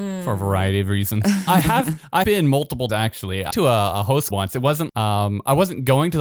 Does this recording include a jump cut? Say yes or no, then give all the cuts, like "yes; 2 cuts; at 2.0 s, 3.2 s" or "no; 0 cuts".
yes; 6 cuts; at 1.5 s, 2.2 s, 2.9 s, 3.5 s, 4.3 s, 4.9 s